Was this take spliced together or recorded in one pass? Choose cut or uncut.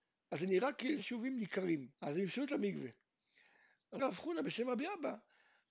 cut